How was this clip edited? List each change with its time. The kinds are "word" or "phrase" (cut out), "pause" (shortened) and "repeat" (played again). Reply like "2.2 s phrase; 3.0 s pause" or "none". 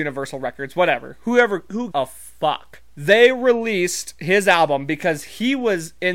1.9 s word; 2.9 s pause